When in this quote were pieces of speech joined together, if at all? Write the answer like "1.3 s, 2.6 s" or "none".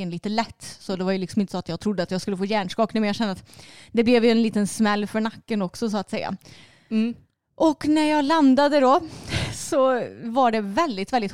none